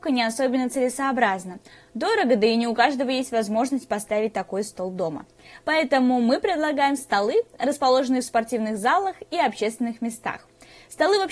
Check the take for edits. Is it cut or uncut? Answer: uncut